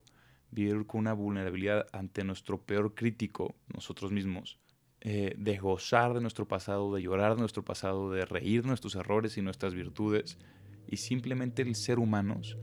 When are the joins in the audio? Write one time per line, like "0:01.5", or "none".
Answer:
0:03.7
0:04.7